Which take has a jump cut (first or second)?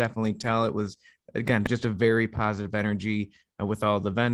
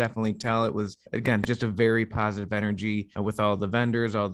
second